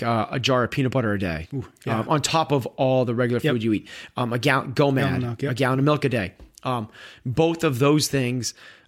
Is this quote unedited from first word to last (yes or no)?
yes